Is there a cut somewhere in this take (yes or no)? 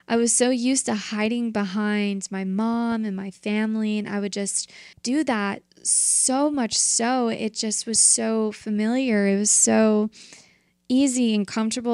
yes